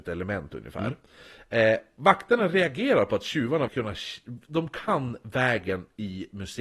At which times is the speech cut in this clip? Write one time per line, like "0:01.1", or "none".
0:03.7